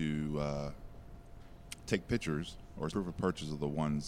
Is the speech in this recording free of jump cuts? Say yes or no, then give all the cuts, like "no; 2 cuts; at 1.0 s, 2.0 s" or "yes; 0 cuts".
no; 1 cut; at 2.9 s